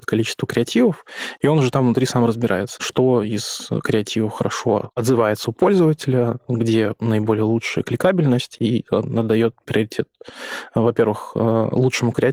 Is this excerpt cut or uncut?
uncut